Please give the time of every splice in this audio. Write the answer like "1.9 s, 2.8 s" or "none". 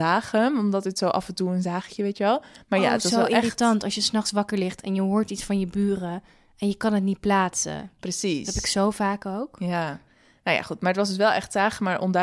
none